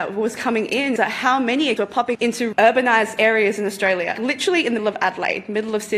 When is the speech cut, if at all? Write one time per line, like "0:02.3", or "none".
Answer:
0:01.0
0:01.8
0:02.1
0:02.5
0:04.1
0:04.8